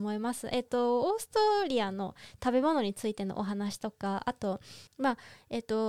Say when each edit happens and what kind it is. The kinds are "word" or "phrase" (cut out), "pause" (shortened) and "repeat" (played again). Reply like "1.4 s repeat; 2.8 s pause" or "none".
4.9 s pause

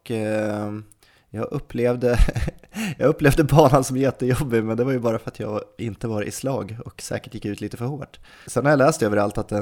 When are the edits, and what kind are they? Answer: none

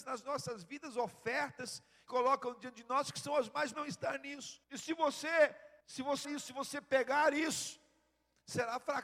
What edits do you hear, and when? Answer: 2.1 s phrase; 3.7 s phrase; 4.6 s pause; 5.8 s pause; 6.2 s word

